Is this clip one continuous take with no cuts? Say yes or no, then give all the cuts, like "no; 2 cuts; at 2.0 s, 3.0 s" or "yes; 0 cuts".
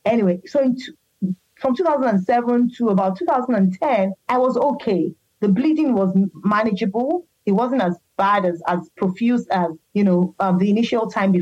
no; 2 cuts; at 4.2 s, 9.8 s